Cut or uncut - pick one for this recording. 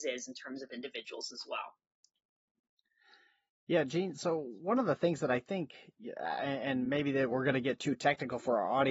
uncut